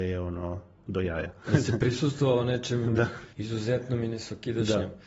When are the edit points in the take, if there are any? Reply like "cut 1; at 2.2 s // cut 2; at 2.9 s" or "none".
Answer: cut 1; at 3.3 s